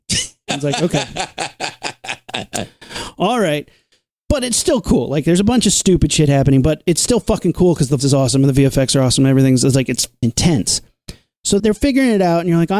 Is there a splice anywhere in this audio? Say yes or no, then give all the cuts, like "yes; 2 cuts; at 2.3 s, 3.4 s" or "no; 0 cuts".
yes; 3 cuts; at 8.0 s, 10.2 s, 11.6 s